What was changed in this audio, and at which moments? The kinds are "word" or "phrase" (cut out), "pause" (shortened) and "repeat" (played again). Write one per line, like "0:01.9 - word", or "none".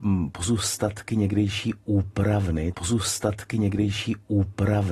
0:02.7 - repeat